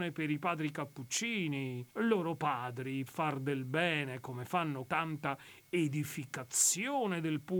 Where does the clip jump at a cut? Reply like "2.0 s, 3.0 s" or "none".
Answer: 1.9 s, 3.1 s, 4.9 s